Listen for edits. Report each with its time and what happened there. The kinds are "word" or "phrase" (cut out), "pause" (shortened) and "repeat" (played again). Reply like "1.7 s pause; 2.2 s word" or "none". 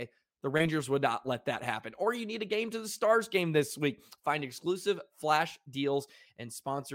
none